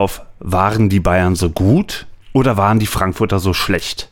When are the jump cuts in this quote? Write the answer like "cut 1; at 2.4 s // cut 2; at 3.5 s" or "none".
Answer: none